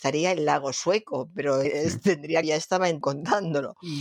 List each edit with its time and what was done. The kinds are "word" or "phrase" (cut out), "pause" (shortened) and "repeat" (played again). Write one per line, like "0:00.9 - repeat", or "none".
0:01.6 - word
0:02.4 - phrase
0:03.0 - word

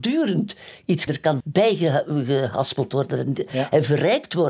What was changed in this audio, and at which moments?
0:01.1 - phrase
0:01.4 - word

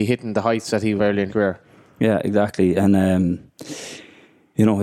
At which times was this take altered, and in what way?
0:01.0 - phrase
0:01.3 - word

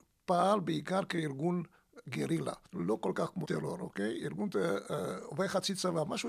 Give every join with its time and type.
0:02.6 - pause
0:03.4 - word

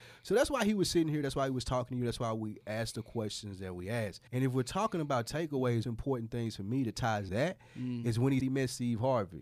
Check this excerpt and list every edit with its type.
0:04.3 - pause
0:05.8 - phrase
0:07.3 - word
0:08.4 - word

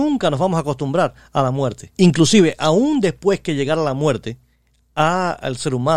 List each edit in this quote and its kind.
0:01.9 - pause

